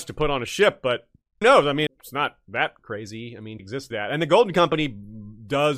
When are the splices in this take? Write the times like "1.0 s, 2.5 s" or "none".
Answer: 1.4 s, 1.9 s, 3.6 s, 3.9 s